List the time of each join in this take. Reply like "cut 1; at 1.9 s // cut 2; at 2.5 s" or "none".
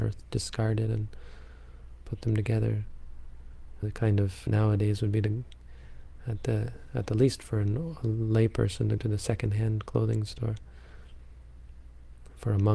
cut 1; at 3.8 s // cut 2; at 4.5 s // cut 3; at 9.0 s